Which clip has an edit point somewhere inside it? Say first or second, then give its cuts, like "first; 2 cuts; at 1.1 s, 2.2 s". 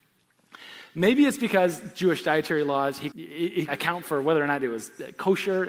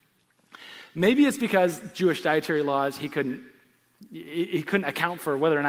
first; 2 cuts; at 3.1 s, 3.7 s